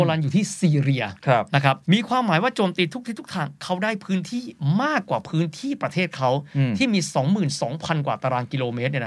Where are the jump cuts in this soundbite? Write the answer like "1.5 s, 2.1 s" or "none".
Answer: 1.8 s